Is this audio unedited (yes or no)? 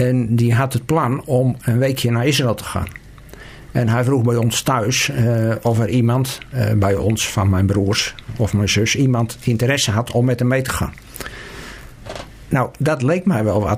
yes